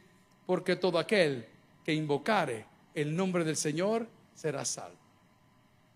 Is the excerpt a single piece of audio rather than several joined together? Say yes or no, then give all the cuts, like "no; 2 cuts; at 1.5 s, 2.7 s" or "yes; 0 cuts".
yes; 0 cuts